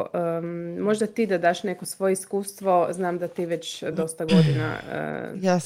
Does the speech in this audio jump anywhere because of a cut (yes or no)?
no